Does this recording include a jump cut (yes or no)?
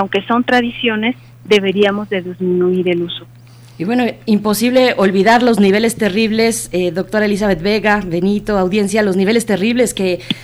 no